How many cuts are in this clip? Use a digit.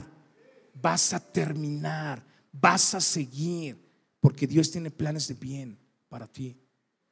0